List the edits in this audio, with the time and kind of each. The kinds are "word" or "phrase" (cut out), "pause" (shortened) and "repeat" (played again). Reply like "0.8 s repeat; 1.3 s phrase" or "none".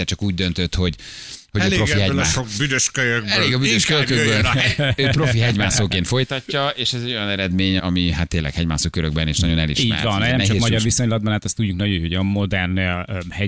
7.8 s word